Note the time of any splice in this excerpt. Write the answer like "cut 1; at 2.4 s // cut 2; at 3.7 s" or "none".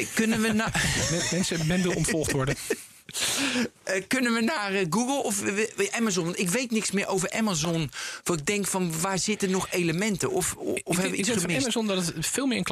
none